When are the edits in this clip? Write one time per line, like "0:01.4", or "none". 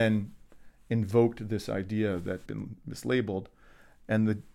0:02.5